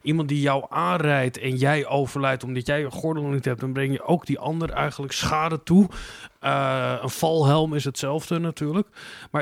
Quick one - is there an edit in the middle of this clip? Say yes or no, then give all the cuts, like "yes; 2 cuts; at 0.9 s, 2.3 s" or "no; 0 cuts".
no; 0 cuts